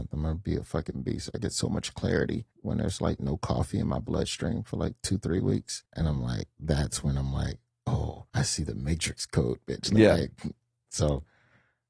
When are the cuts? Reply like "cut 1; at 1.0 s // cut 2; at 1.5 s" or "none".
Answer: cut 1; at 2.5 s // cut 2; at 5.9 s // cut 3; at 8.3 s